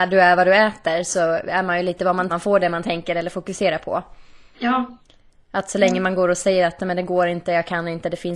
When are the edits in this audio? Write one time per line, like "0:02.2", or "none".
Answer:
0:02.3